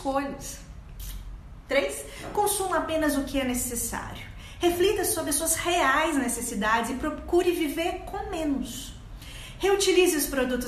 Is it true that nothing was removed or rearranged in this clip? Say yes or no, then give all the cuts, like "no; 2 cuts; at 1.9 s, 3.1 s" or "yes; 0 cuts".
yes; 0 cuts